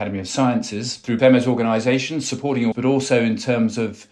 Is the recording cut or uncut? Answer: cut